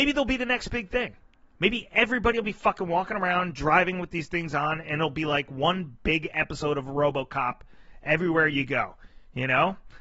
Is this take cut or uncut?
uncut